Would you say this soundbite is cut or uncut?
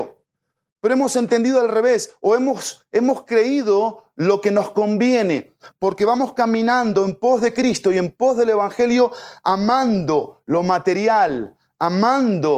uncut